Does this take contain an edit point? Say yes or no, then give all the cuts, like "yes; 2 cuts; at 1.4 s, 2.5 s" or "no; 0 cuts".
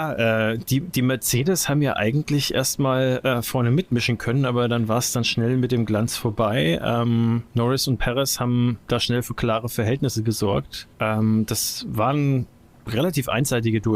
yes; 3 cuts; at 7.5 s, 8.8 s, 10.9 s